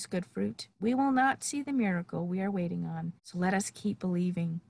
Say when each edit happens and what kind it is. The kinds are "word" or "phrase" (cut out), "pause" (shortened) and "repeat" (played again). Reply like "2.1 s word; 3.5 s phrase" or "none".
3.2 s pause